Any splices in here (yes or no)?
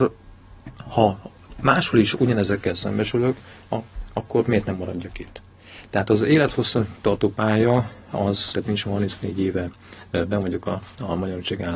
yes